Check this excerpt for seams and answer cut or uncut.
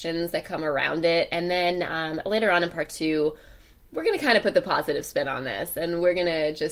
uncut